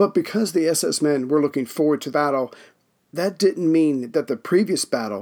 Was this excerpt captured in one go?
no; 1 cut; at 2.1 s

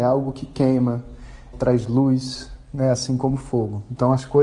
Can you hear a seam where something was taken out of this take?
yes; 1 cut; at 1.5 s

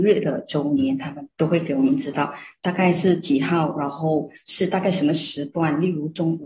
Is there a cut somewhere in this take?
yes; 1 cut; at 1.3 s

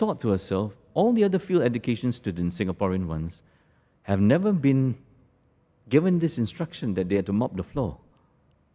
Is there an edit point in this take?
no; 0 cuts

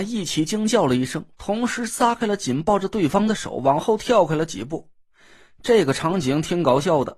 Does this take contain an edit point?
no; 0 cuts

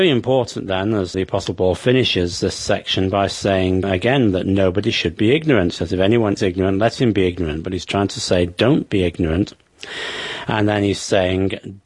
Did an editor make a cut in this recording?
yes; 3 cuts; at 1.1 s, 3.8 s, 6.4 s

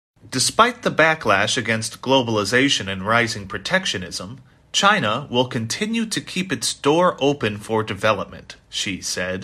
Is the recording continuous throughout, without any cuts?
yes; 0 cuts

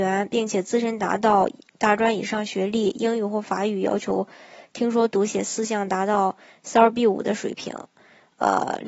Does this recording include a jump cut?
no; 0 cuts

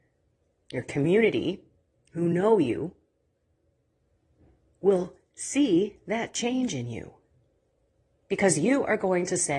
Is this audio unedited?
yes; 0 cuts

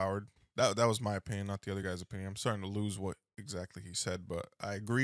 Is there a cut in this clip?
no; 0 cuts

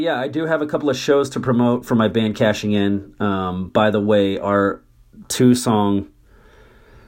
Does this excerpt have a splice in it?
no; 0 cuts

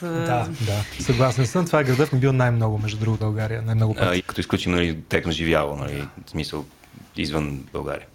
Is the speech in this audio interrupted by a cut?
yes; 4 cuts; at 2.1 s, 3.2 s, 4.2 s, 5.2 s

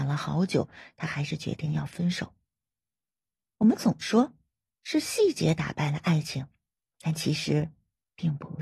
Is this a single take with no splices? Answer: yes; 0 cuts

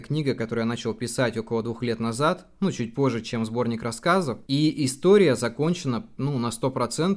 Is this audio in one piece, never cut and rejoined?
yes; 0 cuts

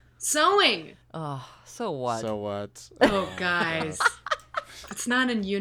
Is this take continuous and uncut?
no; 1 cut; at 1.0 s

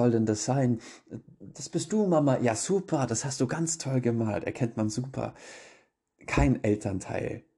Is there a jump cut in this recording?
no; 0 cuts

